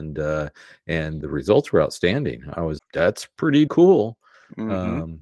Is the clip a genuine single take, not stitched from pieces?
no; 3 cuts; at 1.2 s, 2.8 s, 3.7 s

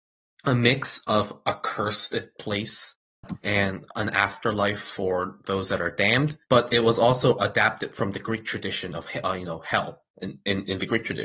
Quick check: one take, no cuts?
no; 2 cuts; at 6.4 s, 10.1 s

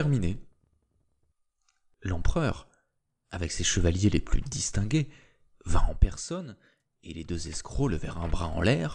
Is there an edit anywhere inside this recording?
no; 0 cuts

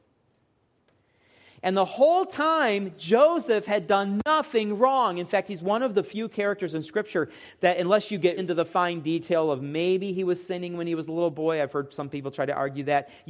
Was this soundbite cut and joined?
yes; 1 cut; at 8.4 s

